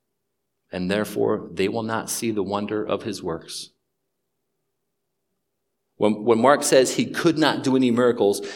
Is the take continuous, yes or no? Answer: yes